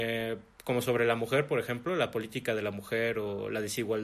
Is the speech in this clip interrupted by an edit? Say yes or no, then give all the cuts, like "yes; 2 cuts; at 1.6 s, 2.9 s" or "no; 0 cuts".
no; 0 cuts